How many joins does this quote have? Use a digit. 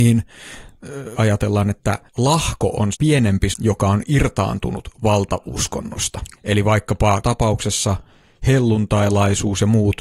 6